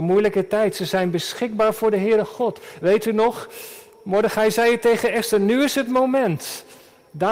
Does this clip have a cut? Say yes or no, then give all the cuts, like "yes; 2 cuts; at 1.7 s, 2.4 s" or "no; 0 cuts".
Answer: no; 0 cuts